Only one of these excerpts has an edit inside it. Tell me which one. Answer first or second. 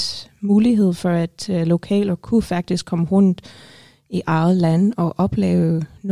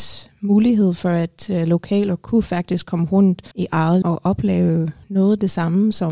second